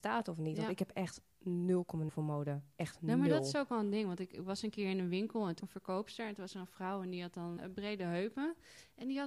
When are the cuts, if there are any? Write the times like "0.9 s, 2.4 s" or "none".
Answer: 2.1 s, 5.6 s, 7.6 s